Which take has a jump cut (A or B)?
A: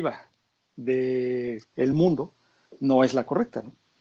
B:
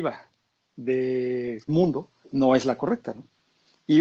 B